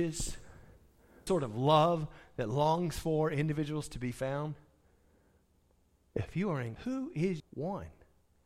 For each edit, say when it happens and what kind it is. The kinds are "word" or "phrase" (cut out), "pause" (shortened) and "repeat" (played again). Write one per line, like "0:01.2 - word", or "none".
0:01.3 - word
0:06.8 - word
0:07.4 - word